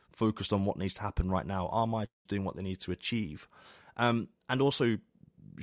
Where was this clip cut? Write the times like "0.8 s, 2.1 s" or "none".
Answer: 2.3 s